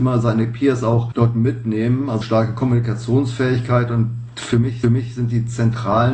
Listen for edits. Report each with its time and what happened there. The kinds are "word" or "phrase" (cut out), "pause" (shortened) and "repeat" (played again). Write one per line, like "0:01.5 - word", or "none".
0:02.2 - phrase
0:04.8 - repeat